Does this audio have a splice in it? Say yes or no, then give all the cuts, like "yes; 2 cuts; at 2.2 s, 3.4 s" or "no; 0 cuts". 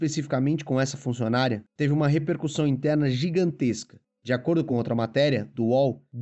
no; 0 cuts